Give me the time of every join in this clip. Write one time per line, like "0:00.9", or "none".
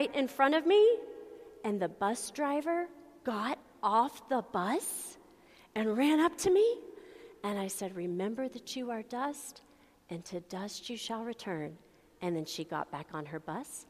none